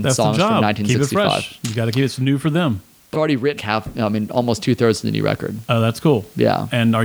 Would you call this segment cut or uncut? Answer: cut